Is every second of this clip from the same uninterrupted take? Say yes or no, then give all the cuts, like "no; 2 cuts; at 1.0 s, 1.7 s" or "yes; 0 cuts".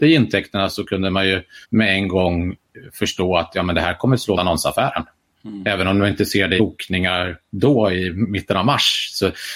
no; 3 cuts; at 1.6 s, 4.4 s, 6.6 s